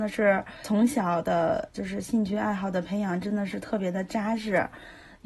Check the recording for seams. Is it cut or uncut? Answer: uncut